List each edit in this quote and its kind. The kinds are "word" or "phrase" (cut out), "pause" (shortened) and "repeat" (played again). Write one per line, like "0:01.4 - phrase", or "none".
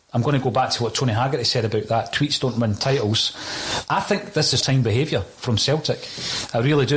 0:04.6 - word